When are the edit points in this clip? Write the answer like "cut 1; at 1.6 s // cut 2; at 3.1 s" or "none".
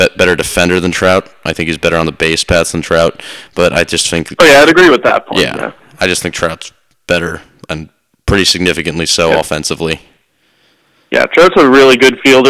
none